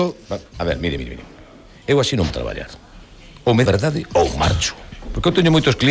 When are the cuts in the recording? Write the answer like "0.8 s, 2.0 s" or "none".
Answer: 1.0 s, 2.3 s, 3.6 s